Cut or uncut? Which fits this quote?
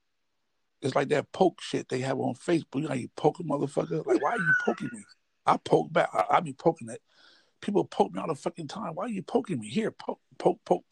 uncut